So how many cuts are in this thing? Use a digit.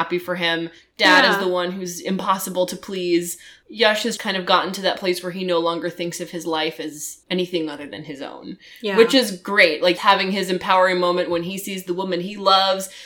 3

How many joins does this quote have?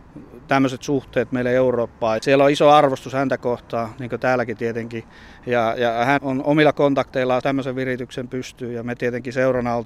3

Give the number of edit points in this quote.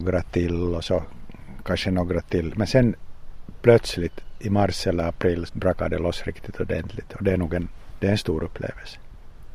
1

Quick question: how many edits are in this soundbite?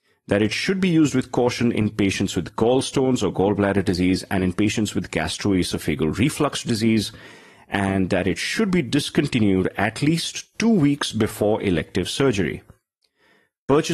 0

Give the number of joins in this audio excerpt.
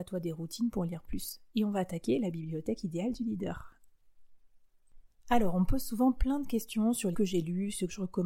1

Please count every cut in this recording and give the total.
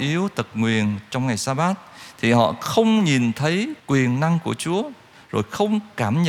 1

